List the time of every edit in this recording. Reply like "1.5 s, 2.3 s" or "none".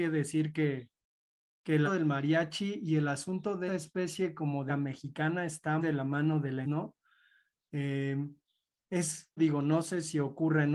1.9 s, 3.7 s, 4.7 s, 5.8 s, 6.6 s, 9.4 s

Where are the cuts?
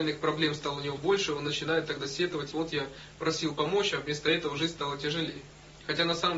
1.0 s, 2.5 s

